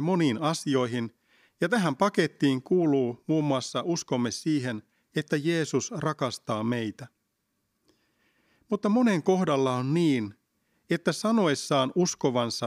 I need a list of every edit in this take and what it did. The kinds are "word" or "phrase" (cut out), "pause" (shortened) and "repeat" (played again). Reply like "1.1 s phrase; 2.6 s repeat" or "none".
none

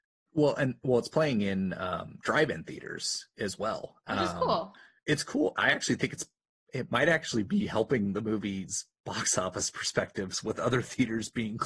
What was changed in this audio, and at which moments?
none

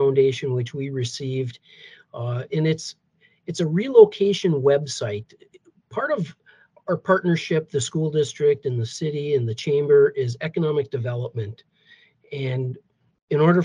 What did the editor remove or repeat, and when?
2.5 s word; 6.8 s word

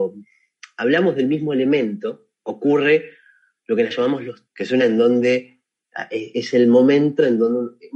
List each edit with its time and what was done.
2.3 s pause; 3.9 s word; 4.5 s word; 4.8 s word

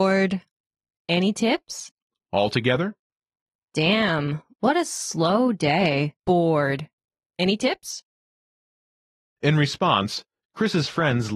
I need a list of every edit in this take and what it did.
2.1 s pause; 6.2 s pause

